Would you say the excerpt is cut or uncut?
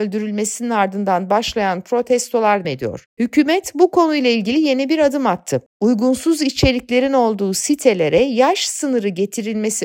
cut